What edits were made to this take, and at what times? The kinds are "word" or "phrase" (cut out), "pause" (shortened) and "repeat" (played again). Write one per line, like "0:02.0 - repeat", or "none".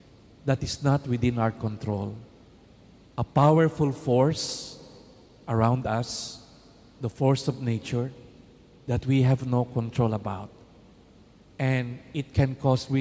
none